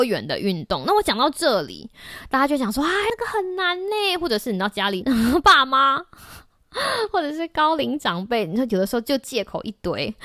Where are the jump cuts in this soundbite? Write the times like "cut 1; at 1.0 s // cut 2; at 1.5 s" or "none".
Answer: none